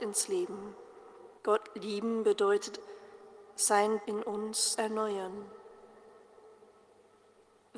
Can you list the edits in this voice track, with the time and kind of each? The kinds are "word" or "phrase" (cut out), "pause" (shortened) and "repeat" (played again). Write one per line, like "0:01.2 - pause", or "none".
0:01.4 - pause
0:02.8 - word
0:04.0 - word
0:04.7 - word